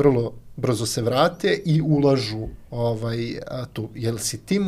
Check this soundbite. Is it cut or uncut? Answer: uncut